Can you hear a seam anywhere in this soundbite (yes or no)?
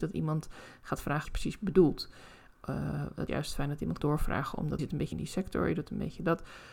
yes